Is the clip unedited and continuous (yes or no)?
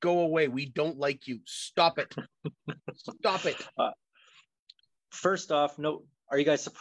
yes